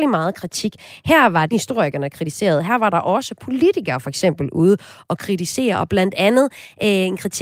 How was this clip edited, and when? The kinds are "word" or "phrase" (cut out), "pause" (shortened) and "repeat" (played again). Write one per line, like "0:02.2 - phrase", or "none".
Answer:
0:01.5 - phrase